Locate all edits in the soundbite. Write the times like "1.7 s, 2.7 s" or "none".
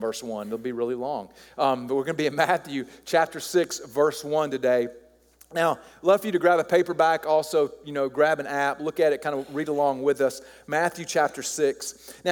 none